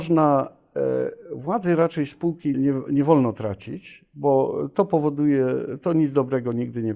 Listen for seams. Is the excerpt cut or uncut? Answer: cut